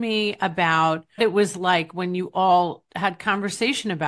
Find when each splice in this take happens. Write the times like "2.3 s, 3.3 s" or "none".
1.2 s

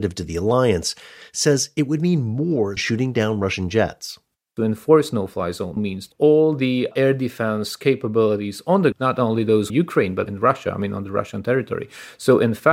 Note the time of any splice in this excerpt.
2.8 s, 5.8 s, 6.1 s, 8.9 s, 9.7 s, 10.3 s

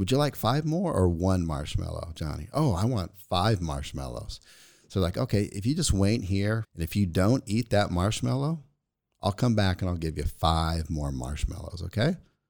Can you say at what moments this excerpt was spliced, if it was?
6.6 s

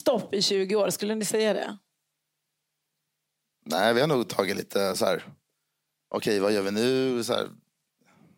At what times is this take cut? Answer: none

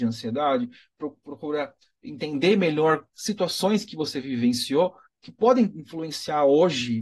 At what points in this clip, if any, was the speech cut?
none

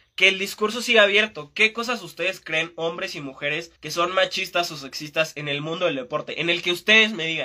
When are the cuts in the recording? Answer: 3.8 s

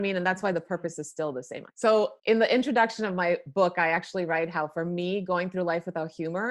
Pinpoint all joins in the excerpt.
2.2 s

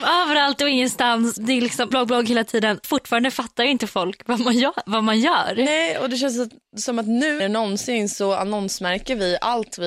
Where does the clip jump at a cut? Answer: 1.4 s, 1.9 s, 2.8 s, 7.4 s

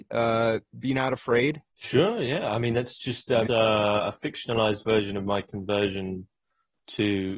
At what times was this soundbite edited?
1.7 s, 3.5 s

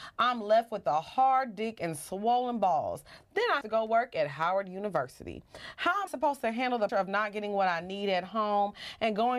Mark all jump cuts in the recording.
3.6 s, 6.1 s, 6.9 s

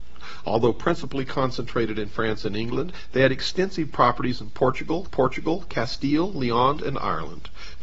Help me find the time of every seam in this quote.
5.1 s, 6.8 s

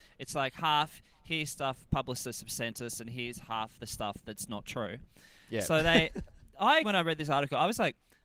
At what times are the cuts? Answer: 6.8 s

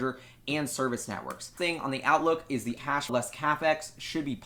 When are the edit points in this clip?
1.6 s, 2.8 s, 3.1 s

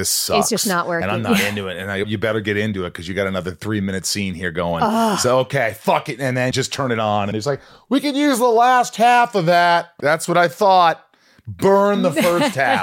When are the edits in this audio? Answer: 2.0 s, 6.5 s, 7.3 s, 10.0 s

